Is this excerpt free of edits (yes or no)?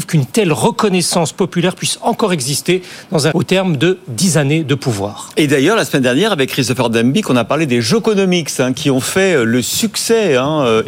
no